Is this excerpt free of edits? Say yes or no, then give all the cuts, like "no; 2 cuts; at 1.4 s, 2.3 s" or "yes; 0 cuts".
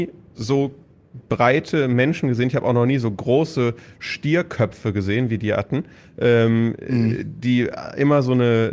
yes; 0 cuts